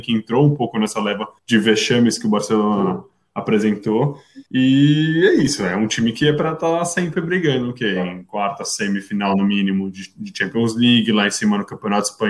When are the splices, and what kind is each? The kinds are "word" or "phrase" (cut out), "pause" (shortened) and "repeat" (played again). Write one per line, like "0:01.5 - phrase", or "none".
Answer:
0:01.4 - pause
0:04.5 - pause